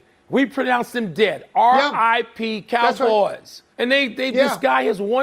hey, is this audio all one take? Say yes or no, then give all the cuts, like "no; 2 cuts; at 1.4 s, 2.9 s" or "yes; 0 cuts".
no; 1 cut; at 3.7 s